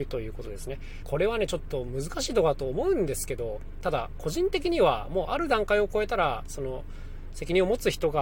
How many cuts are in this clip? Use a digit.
1